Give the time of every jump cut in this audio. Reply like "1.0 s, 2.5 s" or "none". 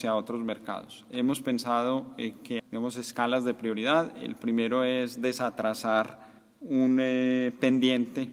2.6 s, 6.4 s